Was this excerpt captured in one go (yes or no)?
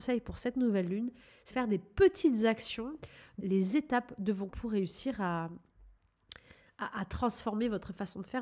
no